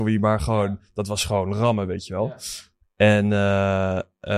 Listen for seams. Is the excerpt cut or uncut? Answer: uncut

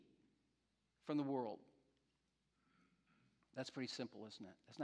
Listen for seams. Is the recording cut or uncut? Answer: uncut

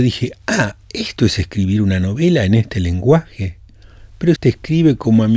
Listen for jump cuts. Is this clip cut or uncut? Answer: cut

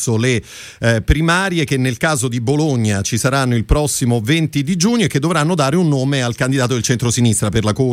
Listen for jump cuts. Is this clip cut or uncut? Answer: uncut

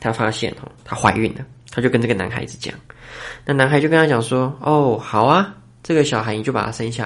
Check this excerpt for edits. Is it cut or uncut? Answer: uncut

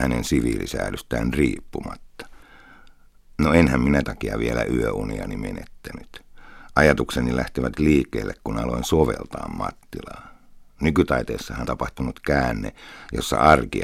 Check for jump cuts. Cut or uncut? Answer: cut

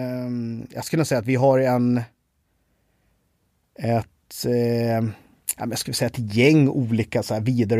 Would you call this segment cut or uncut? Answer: uncut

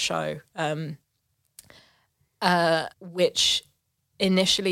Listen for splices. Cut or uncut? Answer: cut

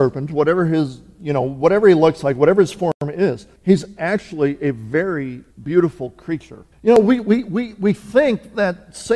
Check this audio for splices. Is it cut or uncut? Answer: cut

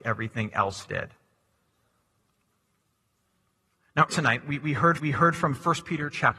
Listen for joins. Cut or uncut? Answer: cut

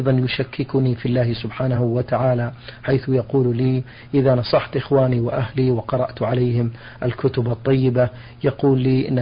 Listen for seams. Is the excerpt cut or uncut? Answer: uncut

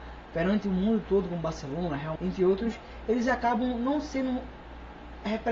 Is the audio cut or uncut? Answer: cut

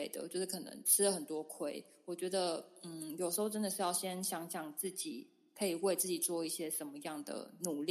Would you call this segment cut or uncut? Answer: uncut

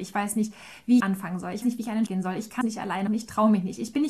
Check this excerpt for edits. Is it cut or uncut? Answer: cut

